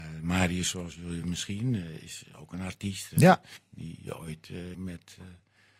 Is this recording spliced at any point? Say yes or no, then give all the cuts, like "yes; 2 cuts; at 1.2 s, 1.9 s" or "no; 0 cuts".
yes; 3 cuts; at 1.2 s, 3.6 s, 4.7 s